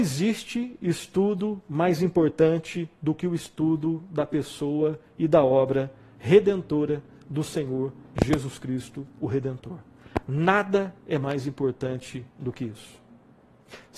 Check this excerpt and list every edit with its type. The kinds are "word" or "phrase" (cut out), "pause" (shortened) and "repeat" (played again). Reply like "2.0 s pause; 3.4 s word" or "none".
none